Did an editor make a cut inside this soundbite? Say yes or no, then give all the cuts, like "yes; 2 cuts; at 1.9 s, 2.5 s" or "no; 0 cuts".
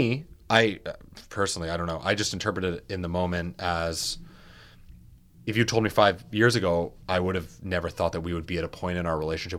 yes; 1 cut; at 7.0 s